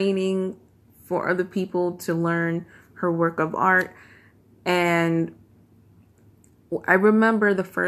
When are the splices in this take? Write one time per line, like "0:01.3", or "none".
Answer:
none